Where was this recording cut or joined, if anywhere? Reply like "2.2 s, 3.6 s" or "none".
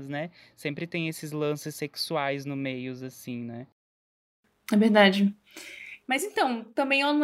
none